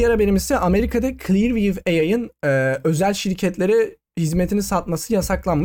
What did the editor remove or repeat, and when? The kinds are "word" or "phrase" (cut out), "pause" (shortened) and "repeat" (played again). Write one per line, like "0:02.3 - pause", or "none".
none